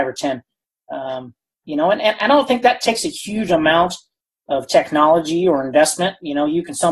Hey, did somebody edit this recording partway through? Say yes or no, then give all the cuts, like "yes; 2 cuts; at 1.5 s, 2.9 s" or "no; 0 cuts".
no; 0 cuts